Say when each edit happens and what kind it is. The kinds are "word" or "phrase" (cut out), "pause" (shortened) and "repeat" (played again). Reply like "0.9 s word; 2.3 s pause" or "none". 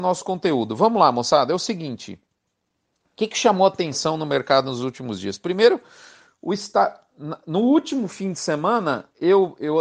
none

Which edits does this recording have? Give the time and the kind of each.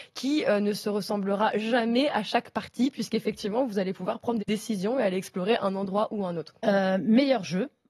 4.4 s word; 6.6 s pause

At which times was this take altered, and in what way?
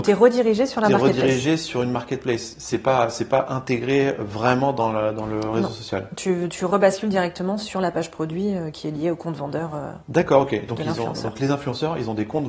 10.0 s pause

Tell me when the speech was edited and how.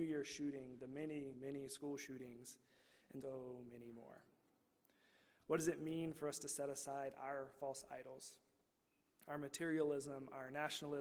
1.3 s word; 3.2 s word

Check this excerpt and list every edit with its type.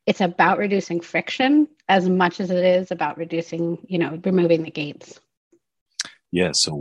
none

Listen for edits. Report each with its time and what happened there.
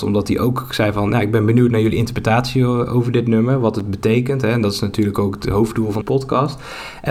6.0 s word

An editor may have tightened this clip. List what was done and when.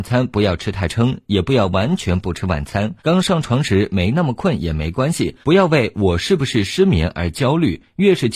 3.0 s pause; 5.4 s pause

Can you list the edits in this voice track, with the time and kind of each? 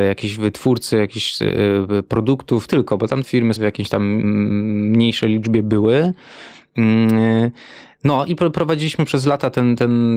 2.7 s phrase; 3.2 s word; 3.6 s phrase

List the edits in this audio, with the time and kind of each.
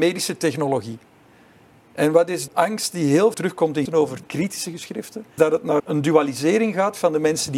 2.5 s word; 3.3 s word; 3.9 s word; 4.2 s word; 5.4 s word; 5.8 s word

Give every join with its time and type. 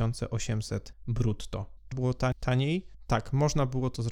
1.9 s word

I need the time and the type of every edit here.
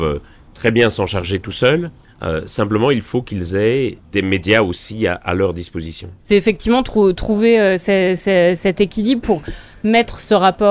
2.0 s pause; 4.0 s pause

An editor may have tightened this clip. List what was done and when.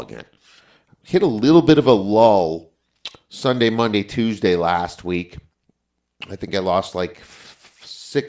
none

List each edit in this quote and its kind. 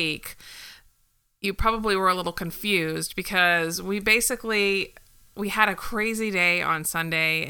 none

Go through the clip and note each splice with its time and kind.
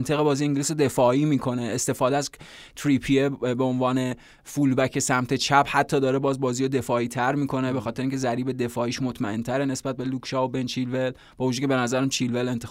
none

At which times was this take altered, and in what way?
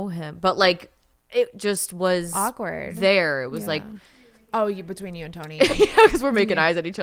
none

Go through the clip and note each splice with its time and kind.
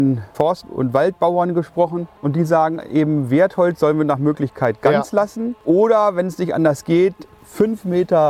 2.1 s pause

